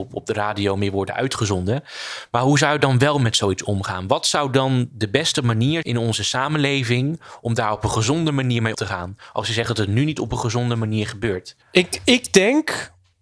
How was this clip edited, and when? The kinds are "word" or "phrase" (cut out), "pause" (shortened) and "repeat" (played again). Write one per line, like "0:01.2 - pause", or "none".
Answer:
0:05.8 - word
0:08.7 - word
0:11.6 - pause